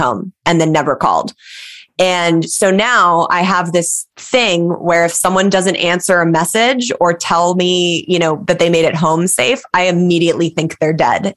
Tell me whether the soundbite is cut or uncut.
uncut